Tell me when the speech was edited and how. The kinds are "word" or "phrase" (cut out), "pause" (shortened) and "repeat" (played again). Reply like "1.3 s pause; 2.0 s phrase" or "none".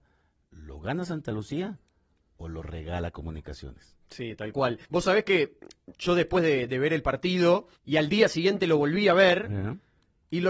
4.8 s pause; 5.9 s pause; 7.8 s pause